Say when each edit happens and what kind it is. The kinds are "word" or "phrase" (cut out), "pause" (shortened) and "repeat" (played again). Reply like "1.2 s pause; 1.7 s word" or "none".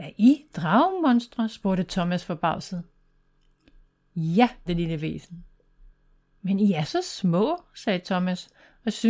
4.7 s word

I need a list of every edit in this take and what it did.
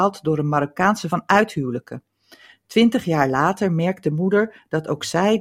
1.1 s word

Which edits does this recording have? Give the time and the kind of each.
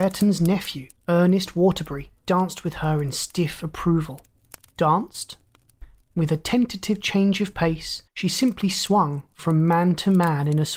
1.0 s pause; 2.2 s pause; 4.4 s pause; 8.1 s pause

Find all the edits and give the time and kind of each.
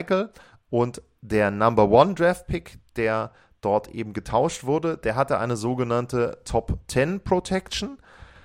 none

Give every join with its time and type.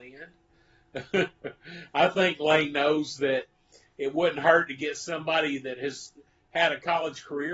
none

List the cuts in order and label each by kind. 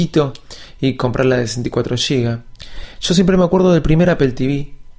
none

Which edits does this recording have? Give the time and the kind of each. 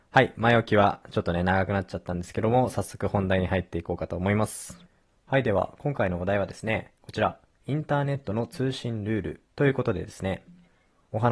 none

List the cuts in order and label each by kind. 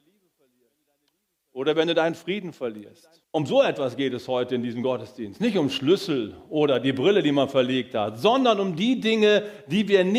3.2 s pause

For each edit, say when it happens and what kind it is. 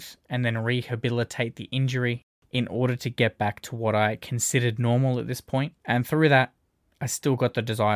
5.8 s pause

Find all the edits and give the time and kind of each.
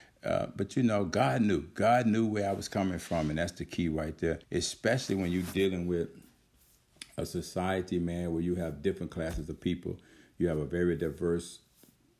4.4 s pause

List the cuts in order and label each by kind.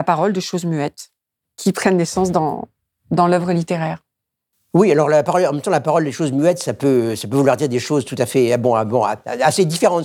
none

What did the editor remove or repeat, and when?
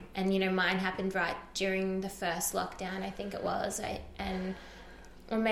none

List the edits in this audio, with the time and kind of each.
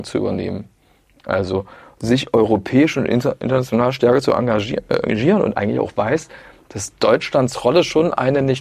none

